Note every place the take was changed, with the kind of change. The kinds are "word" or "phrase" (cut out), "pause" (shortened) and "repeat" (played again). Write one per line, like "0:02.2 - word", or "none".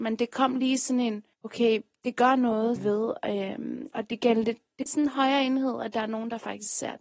0:01.3 - pause
0:02.8 - phrase
0:04.1 - word
0:04.9 - phrase